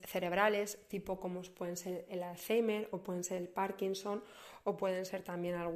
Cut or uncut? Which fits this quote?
uncut